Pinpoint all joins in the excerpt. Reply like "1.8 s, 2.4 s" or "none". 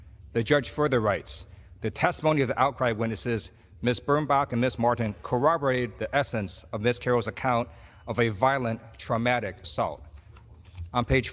9.6 s